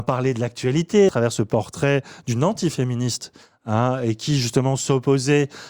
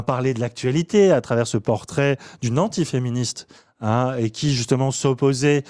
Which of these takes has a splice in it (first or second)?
first